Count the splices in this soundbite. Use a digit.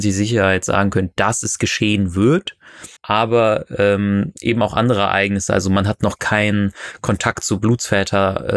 1